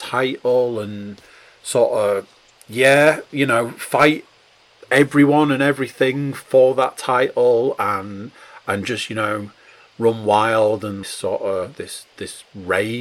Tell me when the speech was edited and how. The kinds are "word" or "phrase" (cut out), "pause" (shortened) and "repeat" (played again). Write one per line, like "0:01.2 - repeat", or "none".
0:11.0 - phrase

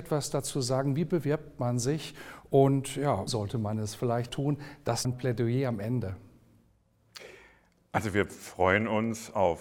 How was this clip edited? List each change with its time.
0:03.3 - word
0:04.3 - word
0:05.0 - word

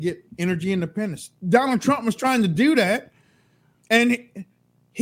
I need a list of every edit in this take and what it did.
none

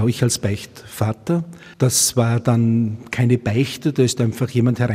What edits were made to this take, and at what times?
0:01.7 - pause

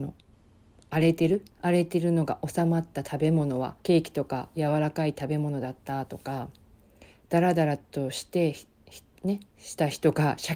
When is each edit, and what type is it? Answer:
0:01.5 - pause
0:03.8 - pause

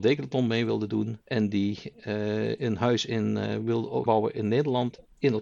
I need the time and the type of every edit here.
0:01.2 - pause
0:04.1 - word

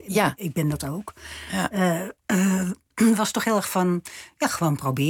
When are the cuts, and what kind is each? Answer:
none

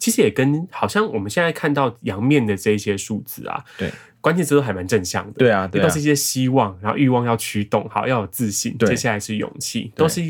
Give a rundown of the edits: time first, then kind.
none

